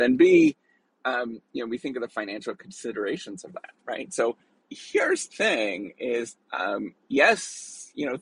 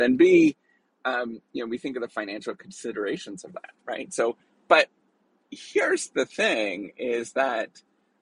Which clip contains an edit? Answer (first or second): first